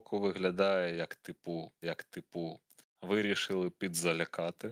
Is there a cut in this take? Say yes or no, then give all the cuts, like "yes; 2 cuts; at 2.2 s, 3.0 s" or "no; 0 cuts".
yes; 1 cut; at 1.8 s